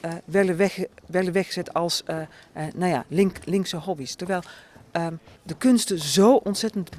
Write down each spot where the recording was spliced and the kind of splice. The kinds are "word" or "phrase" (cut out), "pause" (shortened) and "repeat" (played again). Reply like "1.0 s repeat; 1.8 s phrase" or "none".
5.4 s pause